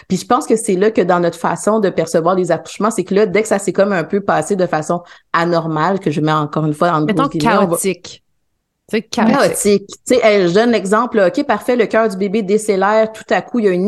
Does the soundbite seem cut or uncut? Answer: uncut